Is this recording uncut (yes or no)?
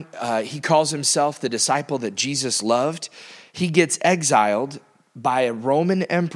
yes